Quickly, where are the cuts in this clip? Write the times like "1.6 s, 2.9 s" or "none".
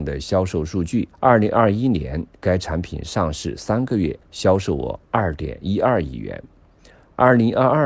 1.1 s, 4.2 s